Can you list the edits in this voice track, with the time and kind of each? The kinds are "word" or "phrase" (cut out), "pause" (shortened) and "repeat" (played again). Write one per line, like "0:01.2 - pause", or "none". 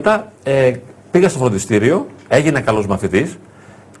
none